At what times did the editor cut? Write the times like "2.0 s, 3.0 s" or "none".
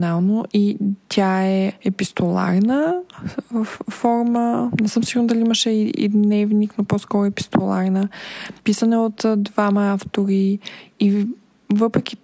1.0 s, 8.6 s

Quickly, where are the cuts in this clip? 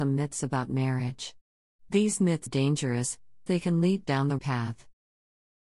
2.5 s, 3.5 s, 4.0 s, 4.4 s

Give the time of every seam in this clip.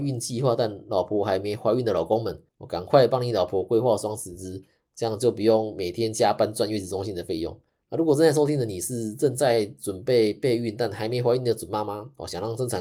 2.5 s, 7.7 s

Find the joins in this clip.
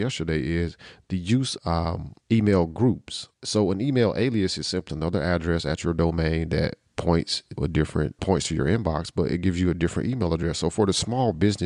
1.6 s, 2.2 s, 3.3 s, 4.9 s, 7.6 s, 8.2 s

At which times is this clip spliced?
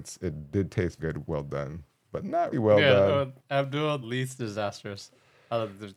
1.0 s, 2.5 s, 3.4 s, 4.0 s

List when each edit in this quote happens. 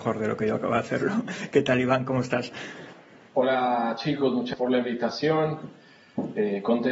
4.5 s

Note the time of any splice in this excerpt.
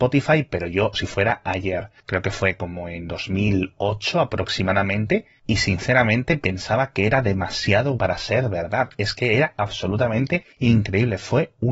0.9 s, 8.0 s, 10.5 s

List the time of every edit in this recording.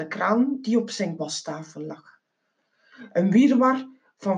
1.2 s

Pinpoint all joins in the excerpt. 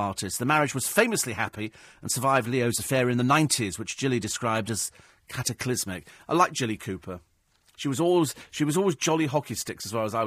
none

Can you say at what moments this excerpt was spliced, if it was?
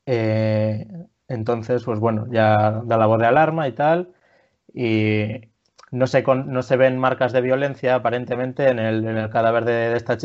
none

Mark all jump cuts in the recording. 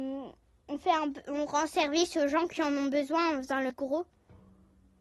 3.7 s

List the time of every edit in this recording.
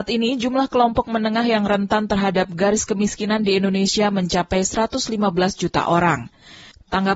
none

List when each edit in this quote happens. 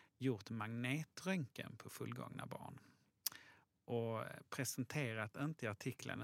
none

